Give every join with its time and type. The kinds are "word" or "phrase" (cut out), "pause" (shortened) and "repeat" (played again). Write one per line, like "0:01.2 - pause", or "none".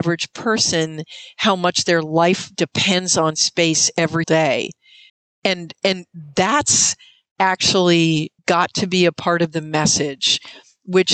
0:04.2 - word
0:05.1 - pause
0:08.4 - pause